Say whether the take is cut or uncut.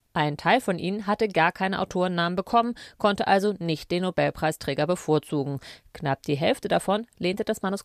uncut